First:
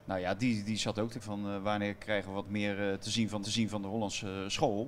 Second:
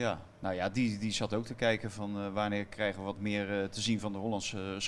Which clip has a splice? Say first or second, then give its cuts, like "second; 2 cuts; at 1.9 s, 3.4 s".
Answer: first; 2 cuts; at 1.2 s, 3.4 s